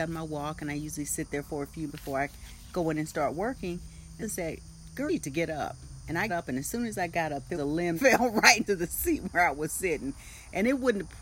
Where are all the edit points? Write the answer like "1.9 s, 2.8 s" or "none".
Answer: 1.9 s, 4.2 s, 5.1 s, 6.3 s, 7.5 s, 8.0 s, 8.7 s

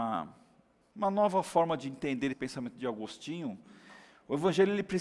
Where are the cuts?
2.3 s

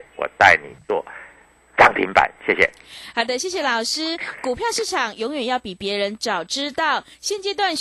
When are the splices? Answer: none

